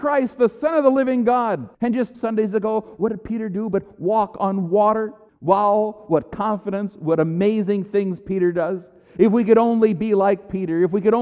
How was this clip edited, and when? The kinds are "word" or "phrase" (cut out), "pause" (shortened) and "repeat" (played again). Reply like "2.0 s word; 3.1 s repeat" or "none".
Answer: 1.7 s pause; 2.1 s word; 5.3 s pause